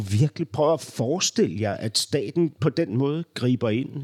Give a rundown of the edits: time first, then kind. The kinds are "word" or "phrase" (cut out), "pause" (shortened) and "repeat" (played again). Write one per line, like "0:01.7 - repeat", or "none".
none